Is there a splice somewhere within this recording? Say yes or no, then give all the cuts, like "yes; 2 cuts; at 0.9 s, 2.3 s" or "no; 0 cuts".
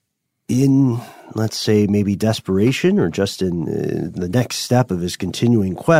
no; 0 cuts